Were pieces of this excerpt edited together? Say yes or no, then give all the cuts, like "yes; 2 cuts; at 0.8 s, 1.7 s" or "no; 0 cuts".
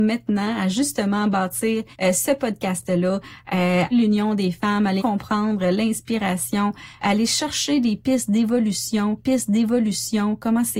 yes; 5 cuts; at 1.9 s, 3.9 s, 5.0 s, 7.0 s, 9.2 s